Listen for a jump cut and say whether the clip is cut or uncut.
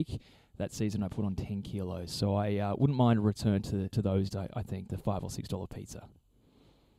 cut